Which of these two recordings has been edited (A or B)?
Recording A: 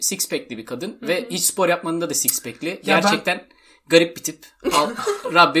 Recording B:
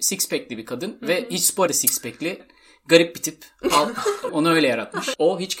B